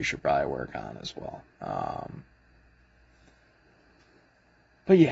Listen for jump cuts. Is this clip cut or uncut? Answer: cut